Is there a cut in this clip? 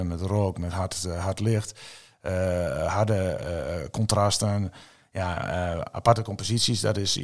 no; 0 cuts

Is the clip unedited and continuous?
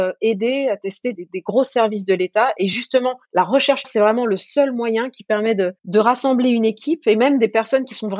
no; 4 cuts; at 1.1 s, 3.2 s, 3.8 s, 5.8 s

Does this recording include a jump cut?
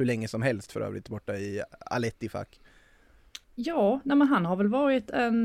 yes; 1 cut; at 3.4 s

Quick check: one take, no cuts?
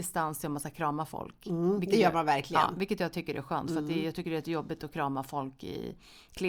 yes; 0 cuts

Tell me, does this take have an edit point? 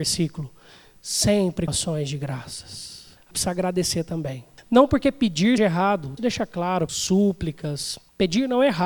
yes; 5 cuts; at 1.7 s, 3.3 s, 5.6 s, 6.2 s, 6.9 s

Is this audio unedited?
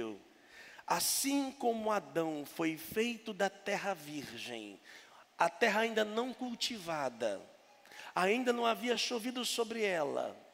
yes; 0 cuts

